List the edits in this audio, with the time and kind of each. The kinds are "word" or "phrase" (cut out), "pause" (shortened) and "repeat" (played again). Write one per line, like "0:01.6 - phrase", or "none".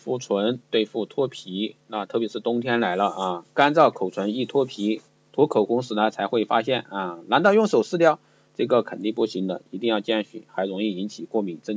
none